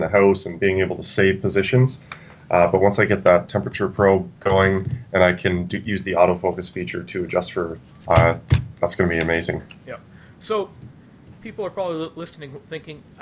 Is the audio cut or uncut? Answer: cut